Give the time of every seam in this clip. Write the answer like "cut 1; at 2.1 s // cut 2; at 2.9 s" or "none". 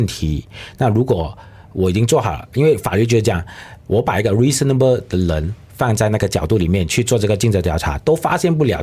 none